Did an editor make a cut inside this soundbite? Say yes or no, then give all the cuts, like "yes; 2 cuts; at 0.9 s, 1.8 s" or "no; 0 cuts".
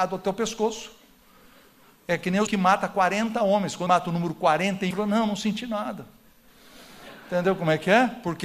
yes; 3 cuts; at 2.5 s, 3.9 s, 4.9 s